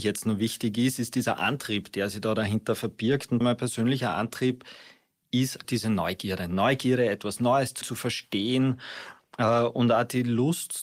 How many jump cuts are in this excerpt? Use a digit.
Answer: 3